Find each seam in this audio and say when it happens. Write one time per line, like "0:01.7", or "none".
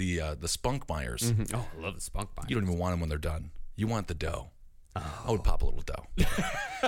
none